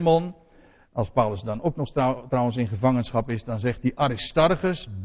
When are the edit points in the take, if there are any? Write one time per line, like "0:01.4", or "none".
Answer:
none